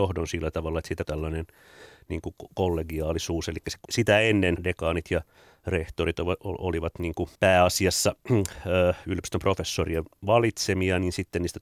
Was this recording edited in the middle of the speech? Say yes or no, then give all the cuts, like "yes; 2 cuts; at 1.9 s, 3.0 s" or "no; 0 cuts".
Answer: yes; 4 cuts; at 1.0 s, 3.8 s, 4.6 s, 7.3 s